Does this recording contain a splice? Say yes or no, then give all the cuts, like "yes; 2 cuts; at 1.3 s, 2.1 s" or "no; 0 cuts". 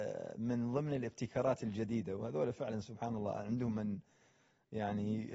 no; 0 cuts